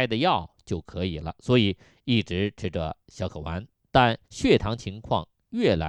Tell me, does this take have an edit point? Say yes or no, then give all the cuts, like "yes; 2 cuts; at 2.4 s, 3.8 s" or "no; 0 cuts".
yes; 1 cut; at 4.2 s